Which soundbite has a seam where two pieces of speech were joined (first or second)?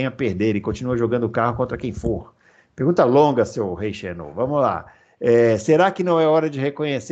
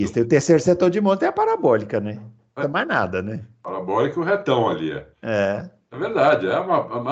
second